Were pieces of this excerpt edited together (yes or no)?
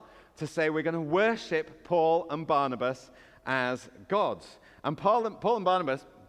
no